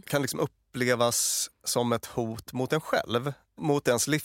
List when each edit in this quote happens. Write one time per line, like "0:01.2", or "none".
none